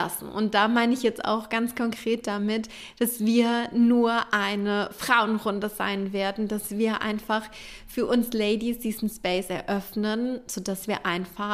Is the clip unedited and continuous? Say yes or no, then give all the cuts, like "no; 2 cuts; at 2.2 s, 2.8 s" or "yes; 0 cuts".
yes; 0 cuts